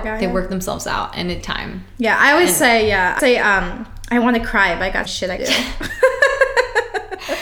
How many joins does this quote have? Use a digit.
4